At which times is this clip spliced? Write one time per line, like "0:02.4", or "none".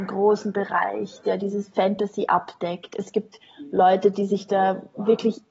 none